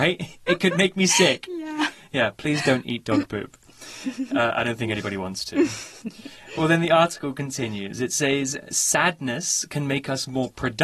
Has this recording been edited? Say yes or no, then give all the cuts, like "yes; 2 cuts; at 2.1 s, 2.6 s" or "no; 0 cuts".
no; 0 cuts